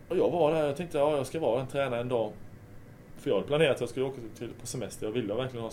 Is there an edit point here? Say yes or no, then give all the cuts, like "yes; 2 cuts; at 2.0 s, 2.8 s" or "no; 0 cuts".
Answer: no; 0 cuts